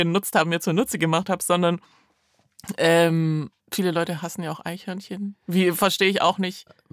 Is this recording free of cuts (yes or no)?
no